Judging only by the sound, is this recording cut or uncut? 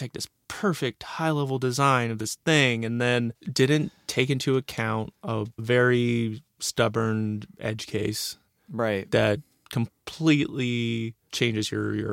uncut